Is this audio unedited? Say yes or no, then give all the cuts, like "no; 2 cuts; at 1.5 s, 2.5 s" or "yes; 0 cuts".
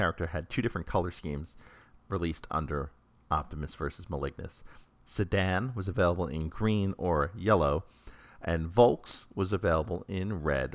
yes; 0 cuts